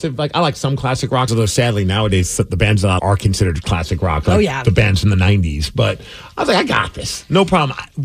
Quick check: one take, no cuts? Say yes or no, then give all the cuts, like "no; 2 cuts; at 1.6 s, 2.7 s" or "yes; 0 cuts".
no; 2 cuts; at 1.3 s, 3.0 s